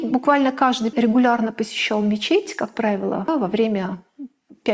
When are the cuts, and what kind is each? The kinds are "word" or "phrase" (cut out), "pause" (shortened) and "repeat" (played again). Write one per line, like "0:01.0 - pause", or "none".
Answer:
0:00.9 - word

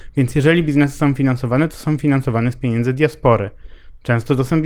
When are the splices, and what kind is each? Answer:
none

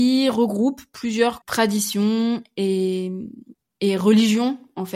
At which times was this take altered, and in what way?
0:01.4 - word

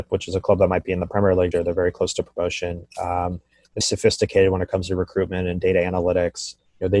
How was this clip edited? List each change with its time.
0:01.5 - word
0:03.8 - word

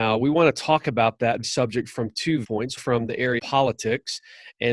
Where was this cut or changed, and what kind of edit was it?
0:01.4 - word
0:02.4 - word
0:02.8 - word
0:03.4 - word

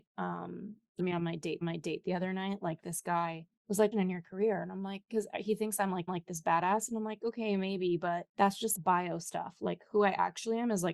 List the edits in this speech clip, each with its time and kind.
0:01.0 - phrase
0:01.6 - repeat
0:03.6 - pause
0:03.9 - phrase
0:06.1 - repeat
0:08.3 - pause
0:08.7 - word

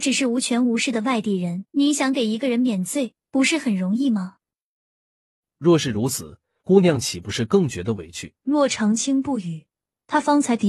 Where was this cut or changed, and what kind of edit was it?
0:01.7 - pause
0:03.2 - pause
0:08.4 - pause

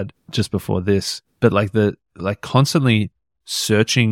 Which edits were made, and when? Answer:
none

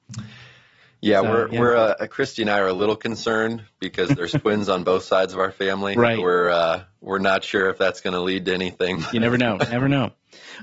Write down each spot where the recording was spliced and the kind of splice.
none

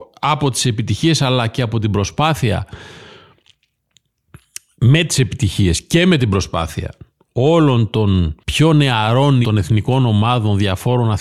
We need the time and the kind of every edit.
0:08.4 - pause
0:09.4 - word

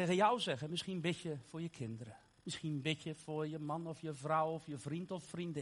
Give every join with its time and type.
0:02.3 - pause

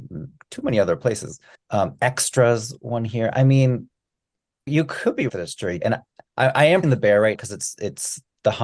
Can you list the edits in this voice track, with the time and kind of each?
0:01.5 - pause
0:04.7 - word
0:05.3 - word
0:05.8 - word
0:06.8 - word
0:07.3 - word

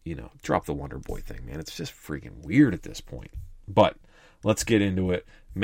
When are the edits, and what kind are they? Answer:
none

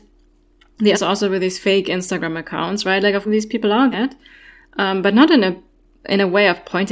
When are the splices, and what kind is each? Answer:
0:00.9 - phrase
0:03.3 - phrase
0:03.9 - phrase

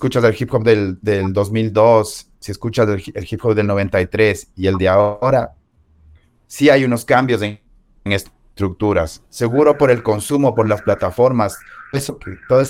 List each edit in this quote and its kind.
0:09.3 - pause

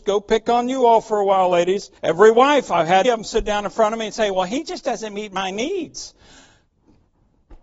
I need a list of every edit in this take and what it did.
0:02.0 - pause
0:03.0 - word

